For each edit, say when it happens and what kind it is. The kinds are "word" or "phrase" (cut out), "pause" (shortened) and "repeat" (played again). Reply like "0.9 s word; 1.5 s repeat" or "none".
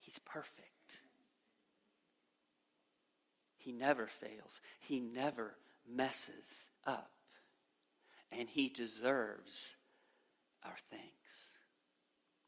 6.8 s pause

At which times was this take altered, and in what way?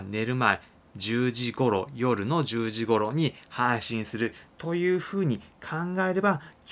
none

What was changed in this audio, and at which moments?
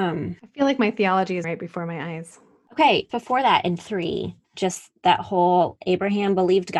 1.4 s word; 3.1 s word; 4.4 s pause

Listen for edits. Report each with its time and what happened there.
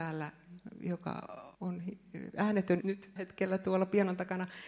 1.5 s pause; 2.8 s word; 3.2 s word

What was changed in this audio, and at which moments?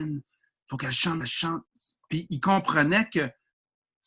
1.2 s phrase; 2.3 s word

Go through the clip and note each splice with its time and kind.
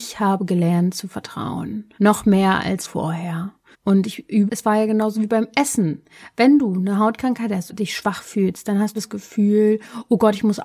2.0 s pause; 2.8 s word; 3.7 s pause; 4.5 s phrase; 7.7 s word; 8.9 s phrase

